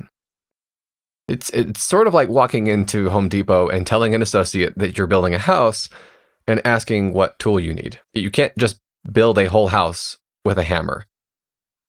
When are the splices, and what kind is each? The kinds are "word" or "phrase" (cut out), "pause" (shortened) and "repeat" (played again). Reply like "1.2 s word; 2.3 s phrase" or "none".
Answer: 8.0 s pause